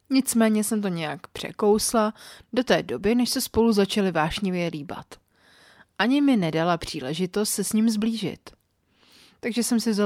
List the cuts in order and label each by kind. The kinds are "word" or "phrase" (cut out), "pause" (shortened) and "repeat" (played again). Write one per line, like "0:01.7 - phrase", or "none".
none